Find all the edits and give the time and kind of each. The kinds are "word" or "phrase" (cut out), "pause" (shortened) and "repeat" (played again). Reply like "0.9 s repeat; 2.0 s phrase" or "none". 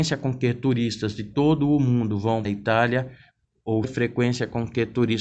2.4 s phrase; 3.8 s word